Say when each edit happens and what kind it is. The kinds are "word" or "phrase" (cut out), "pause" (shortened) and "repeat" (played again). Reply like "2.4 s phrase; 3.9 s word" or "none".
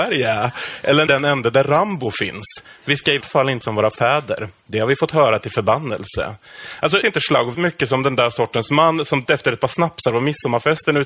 1.1 s word; 3.2 s word; 3.6 s word; 7.0 s word; 7.5 s word; 9.3 s word